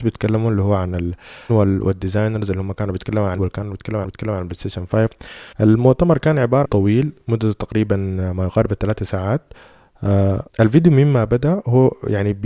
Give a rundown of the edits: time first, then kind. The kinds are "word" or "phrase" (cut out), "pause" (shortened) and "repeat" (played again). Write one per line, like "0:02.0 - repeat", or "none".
0:01.5 - word
0:03.4 - word
0:04.0 - repeat
0:05.5 - pause
0:06.6 - phrase
0:10.5 - pause

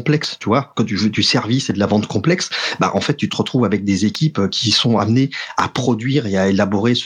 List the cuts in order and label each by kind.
none

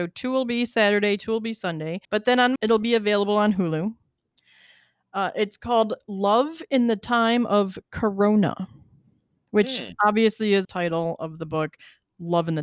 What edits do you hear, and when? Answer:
0:02.0 - pause
0:02.6 - word
0:10.6 - phrase

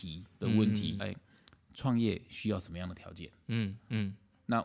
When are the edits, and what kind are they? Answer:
0:01.0 - phrase

